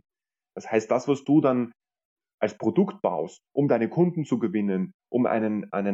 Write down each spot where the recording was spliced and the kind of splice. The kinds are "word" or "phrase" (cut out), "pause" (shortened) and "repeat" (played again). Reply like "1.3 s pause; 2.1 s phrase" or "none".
none